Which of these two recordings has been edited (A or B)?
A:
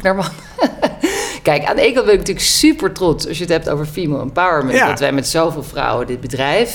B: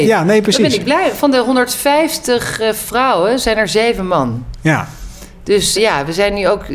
B